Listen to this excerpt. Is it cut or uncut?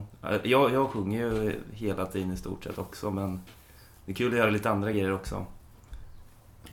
uncut